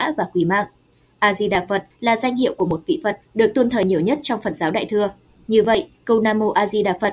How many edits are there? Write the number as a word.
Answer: zero